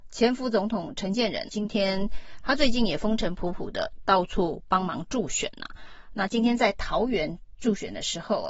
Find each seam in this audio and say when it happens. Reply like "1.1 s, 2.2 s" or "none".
1.5 s